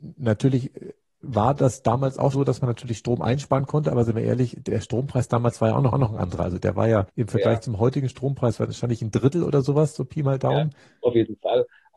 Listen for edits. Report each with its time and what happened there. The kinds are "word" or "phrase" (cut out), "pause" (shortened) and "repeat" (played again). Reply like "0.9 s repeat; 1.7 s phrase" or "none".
2.3 s word; 5.9 s repeat; 7.1 s pause